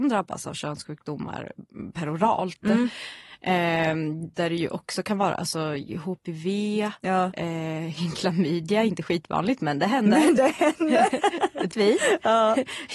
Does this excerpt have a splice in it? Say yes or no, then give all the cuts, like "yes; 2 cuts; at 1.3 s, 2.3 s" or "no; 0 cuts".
yes; 2 cuts; at 4.3 s, 11.7 s